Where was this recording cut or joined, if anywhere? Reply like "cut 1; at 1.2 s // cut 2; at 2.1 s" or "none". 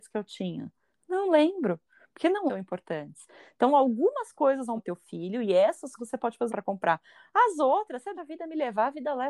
cut 1; at 2.5 s // cut 2; at 4.8 s // cut 3; at 6.0 s // cut 4; at 6.5 s // cut 5; at 8.1 s